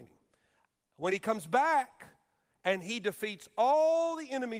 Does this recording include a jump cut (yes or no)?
no